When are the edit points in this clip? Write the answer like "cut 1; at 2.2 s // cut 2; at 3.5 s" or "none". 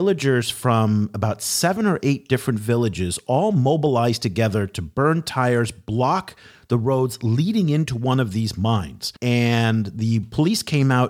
cut 1; at 9.2 s